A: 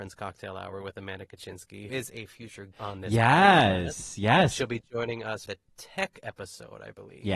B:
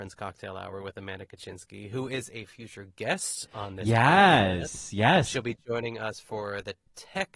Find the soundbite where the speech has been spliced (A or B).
A